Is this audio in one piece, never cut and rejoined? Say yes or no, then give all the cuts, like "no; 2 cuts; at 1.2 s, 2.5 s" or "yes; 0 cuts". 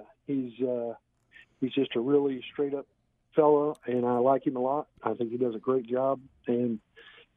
yes; 0 cuts